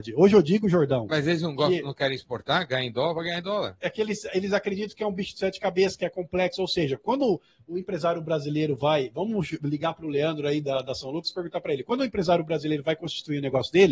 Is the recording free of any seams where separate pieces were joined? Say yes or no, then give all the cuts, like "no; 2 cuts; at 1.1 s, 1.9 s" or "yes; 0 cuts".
yes; 0 cuts